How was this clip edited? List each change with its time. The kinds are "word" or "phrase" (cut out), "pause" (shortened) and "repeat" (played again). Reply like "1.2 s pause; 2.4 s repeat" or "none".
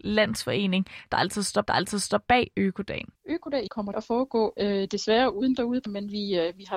1.7 s repeat; 3.2 s pause; 3.9 s word; 4.6 s phrase; 5.6 s word; 5.9 s word